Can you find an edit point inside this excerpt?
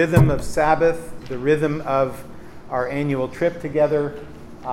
no; 0 cuts

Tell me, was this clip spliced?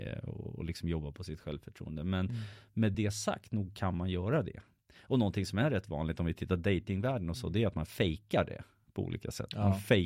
no; 0 cuts

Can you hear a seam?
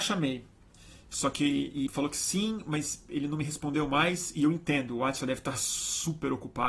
yes; 1 cut; at 1.9 s

